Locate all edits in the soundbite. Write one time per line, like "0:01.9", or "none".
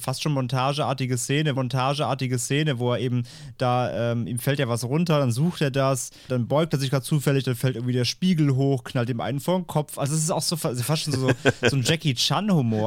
0:01.6
0:06.3